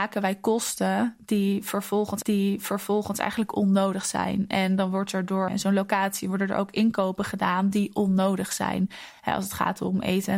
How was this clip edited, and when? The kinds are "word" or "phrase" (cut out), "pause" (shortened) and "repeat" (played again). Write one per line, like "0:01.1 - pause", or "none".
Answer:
0:02.2 - repeat
0:05.5 - phrase